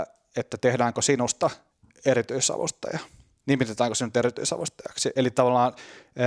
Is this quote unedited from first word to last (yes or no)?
no